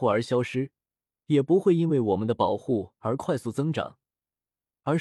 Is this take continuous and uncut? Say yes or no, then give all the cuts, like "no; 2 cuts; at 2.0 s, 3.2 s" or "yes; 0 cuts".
yes; 0 cuts